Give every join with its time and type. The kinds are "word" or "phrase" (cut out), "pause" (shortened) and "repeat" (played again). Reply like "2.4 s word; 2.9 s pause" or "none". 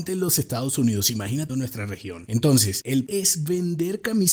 1.5 s word; 3.1 s word